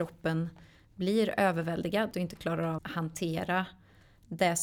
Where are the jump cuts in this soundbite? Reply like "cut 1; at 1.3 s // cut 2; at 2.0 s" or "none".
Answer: cut 1; at 2.1 s // cut 2; at 2.8 s